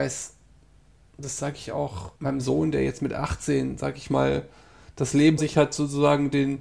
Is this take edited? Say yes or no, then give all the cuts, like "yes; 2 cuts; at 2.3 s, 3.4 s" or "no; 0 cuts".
yes; 2 cuts; at 2.2 s, 5.4 s